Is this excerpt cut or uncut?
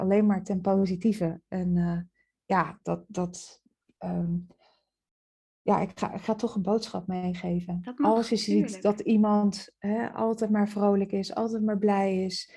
uncut